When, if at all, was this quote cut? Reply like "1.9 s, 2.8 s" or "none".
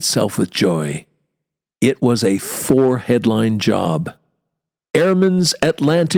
none